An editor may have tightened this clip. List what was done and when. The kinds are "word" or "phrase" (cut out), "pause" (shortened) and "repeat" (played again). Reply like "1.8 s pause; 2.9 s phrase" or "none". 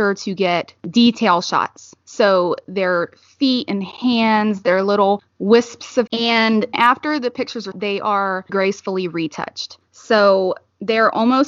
6.1 s word; 6.7 s word; 7.7 s word; 8.5 s word